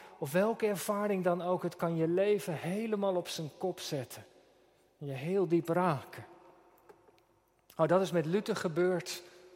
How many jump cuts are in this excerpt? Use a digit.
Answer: 0